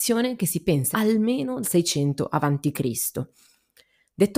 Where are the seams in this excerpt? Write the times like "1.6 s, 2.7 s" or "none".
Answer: 0.9 s, 1.6 s